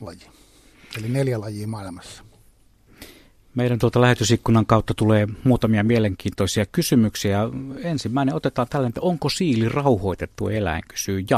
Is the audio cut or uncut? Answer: uncut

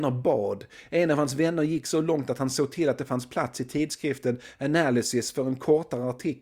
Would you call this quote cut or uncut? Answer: uncut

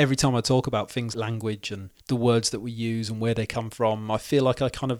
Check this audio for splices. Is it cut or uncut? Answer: cut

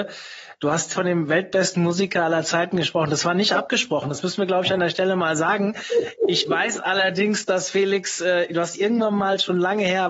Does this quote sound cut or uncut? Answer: uncut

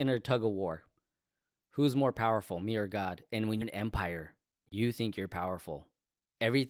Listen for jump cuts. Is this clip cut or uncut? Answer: cut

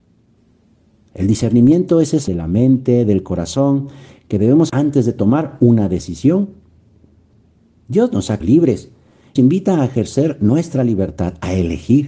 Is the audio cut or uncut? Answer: cut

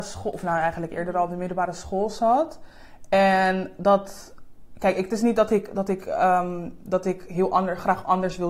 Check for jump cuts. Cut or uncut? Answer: uncut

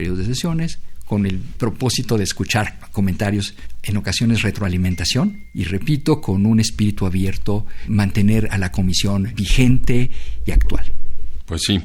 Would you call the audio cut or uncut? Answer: uncut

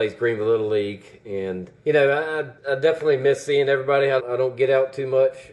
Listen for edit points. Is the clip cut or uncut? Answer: cut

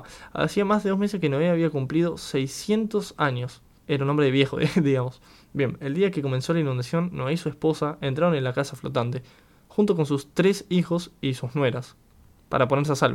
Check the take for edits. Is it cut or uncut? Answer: cut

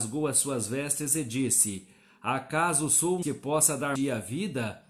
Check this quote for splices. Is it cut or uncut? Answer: cut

